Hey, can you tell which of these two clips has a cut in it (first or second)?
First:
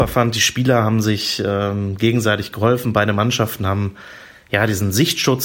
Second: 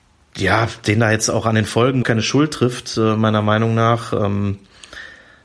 second